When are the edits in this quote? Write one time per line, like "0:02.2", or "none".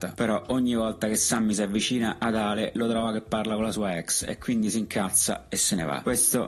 none